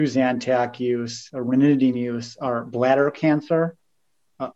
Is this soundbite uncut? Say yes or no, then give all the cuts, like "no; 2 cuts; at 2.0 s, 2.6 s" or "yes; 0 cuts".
yes; 0 cuts